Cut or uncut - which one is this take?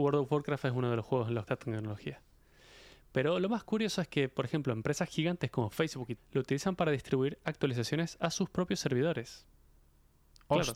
cut